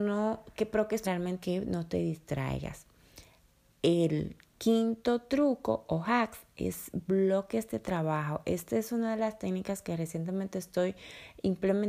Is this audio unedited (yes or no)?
no